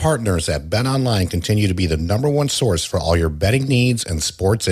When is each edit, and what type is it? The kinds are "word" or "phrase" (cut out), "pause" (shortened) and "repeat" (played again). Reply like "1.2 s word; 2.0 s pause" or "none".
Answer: none